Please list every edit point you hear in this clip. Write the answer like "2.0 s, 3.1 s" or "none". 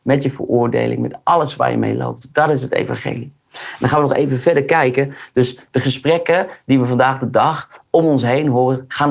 none

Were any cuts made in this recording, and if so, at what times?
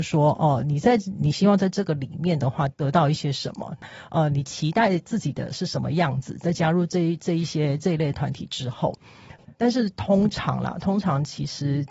2.7 s, 9.5 s

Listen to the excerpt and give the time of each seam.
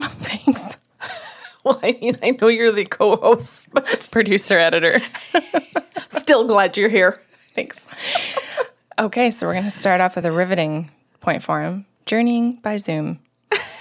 none

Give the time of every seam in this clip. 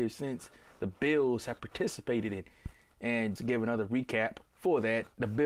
3.4 s, 4.5 s

